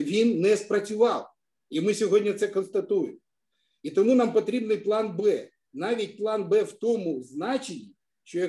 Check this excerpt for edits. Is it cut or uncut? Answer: uncut